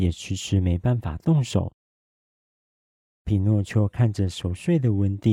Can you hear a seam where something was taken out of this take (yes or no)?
no